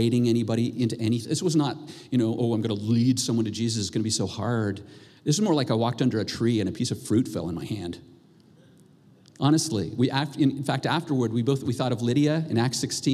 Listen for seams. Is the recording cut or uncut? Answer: uncut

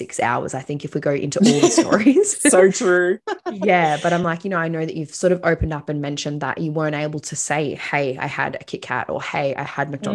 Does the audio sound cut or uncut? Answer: uncut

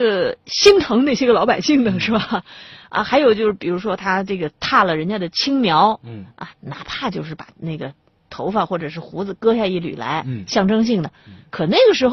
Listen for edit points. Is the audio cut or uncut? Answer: uncut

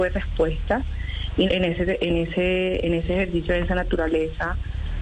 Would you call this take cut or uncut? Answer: cut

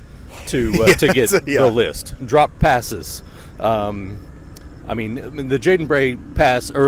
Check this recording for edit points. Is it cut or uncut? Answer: uncut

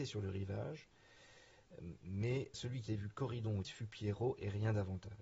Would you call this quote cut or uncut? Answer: cut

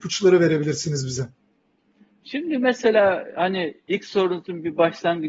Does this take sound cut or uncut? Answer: uncut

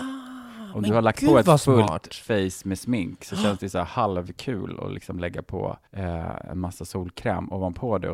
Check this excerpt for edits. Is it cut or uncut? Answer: cut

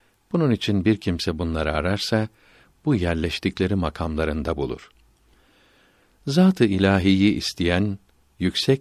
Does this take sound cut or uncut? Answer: uncut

